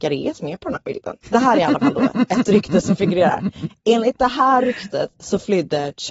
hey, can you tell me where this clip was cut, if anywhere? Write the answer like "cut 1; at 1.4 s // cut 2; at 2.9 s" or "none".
cut 1; at 1.2 s